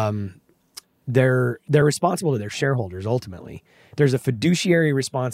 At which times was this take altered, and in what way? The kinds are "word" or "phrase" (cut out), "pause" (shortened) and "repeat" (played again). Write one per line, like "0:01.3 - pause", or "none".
none